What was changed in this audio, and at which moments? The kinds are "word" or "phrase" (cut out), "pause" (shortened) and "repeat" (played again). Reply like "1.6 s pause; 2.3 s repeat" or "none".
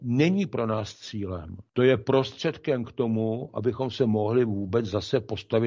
1.7 s pause